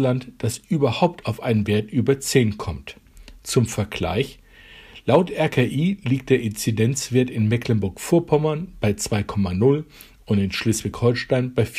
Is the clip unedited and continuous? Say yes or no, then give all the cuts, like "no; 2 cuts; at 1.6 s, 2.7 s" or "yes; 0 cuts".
yes; 0 cuts